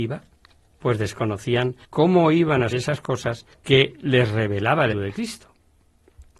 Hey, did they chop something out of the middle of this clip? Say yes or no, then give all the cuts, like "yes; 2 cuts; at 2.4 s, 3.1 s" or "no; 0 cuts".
yes; 4 cuts; at 1.8 s, 2.7 s, 3.5 s, 4.9 s